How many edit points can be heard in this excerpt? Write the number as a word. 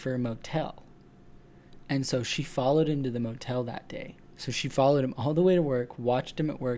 one